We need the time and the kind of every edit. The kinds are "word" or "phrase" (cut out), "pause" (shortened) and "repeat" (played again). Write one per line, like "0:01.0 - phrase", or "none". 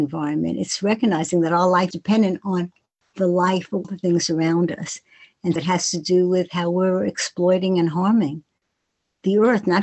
0:01.9 - word
0:03.8 - word
0:05.6 - word